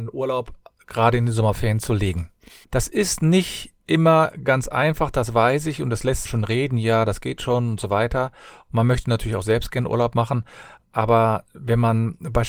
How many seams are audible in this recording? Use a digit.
2